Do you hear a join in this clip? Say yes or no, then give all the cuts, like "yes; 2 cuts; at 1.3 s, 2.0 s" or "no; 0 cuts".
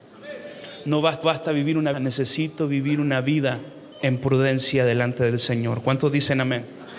yes; 3 cuts; at 1.2 s, 1.9 s, 3.9 s